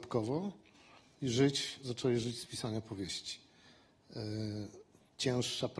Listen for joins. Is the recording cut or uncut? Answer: uncut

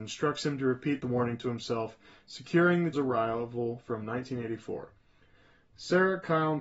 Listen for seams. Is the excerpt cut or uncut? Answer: cut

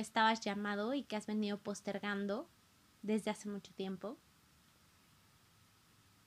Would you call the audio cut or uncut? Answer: uncut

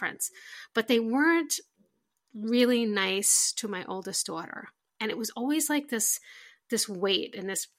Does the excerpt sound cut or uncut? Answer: uncut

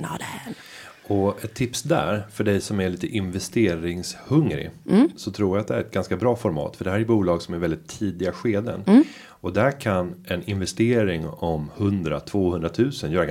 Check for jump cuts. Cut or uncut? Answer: uncut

